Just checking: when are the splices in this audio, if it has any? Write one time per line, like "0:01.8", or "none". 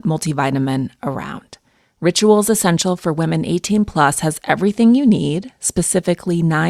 none